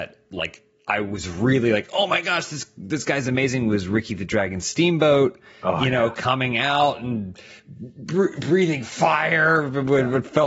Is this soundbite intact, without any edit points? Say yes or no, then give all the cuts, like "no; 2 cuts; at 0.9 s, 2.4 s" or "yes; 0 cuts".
yes; 0 cuts